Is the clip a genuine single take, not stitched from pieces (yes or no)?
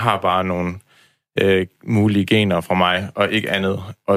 yes